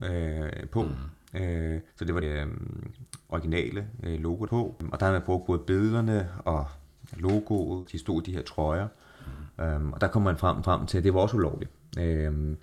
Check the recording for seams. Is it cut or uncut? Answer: cut